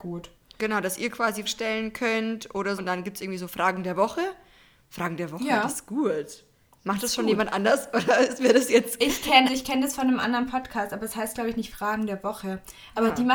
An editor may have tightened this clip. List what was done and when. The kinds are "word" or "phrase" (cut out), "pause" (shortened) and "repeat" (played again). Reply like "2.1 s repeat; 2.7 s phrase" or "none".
1.5 s word; 2.8 s word; 9.5 s word